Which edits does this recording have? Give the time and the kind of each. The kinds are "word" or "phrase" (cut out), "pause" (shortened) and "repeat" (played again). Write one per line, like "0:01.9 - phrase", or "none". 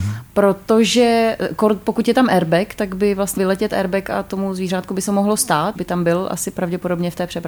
0:03.4 - word
0:05.1 - word
0:05.8 - word